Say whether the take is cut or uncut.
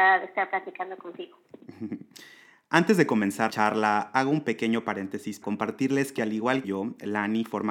cut